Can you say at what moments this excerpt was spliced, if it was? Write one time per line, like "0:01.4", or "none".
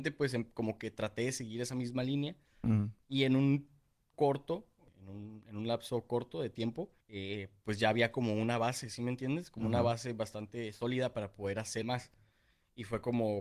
0:04.1
0:07.0
0:11.8